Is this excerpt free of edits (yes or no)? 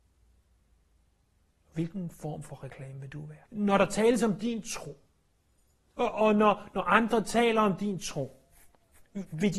no